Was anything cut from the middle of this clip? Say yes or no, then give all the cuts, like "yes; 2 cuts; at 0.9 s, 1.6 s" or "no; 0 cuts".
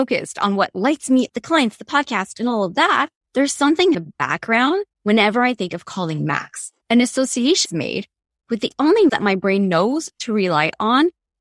yes; 7 cuts; at 1.3 s, 3.2 s, 3.9 s, 4.9 s, 6.8 s, 7.7 s, 9.1 s